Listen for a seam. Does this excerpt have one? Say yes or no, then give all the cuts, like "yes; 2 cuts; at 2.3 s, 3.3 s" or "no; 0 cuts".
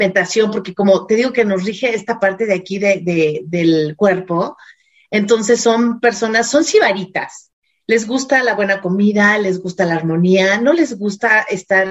no; 0 cuts